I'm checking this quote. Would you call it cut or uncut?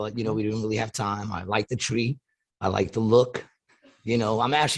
uncut